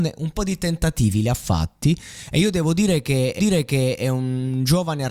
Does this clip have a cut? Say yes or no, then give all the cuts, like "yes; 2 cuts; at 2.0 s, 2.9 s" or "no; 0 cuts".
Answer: yes; 1 cut; at 3.4 s